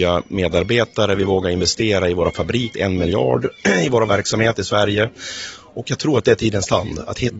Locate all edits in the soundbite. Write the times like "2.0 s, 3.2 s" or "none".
2.7 s